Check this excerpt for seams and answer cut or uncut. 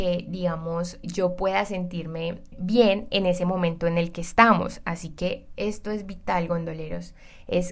cut